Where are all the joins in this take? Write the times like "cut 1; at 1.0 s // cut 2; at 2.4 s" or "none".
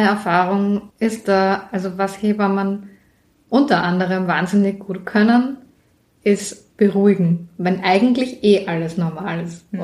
cut 1; at 0.9 s